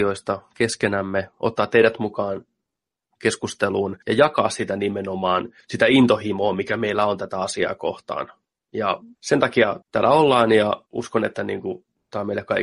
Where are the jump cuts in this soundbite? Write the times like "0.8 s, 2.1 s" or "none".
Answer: 4.0 s, 9.1 s, 9.8 s, 10.9 s